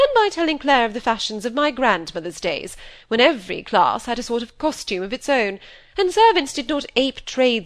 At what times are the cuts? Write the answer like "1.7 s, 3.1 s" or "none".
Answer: none